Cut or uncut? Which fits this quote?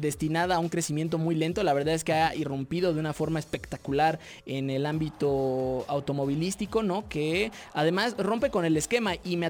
uncut